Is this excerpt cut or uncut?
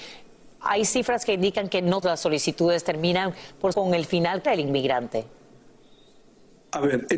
cut